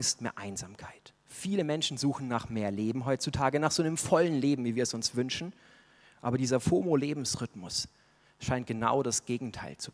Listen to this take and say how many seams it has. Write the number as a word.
one